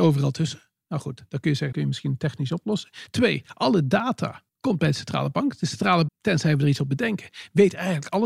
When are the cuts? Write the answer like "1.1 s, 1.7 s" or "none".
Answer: 1.7 s, 4.5 s, 6.1 s